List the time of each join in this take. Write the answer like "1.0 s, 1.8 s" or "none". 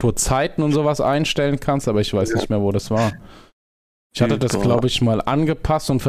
none